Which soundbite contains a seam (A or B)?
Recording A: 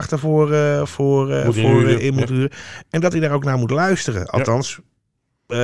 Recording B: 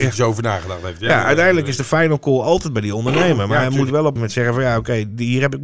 B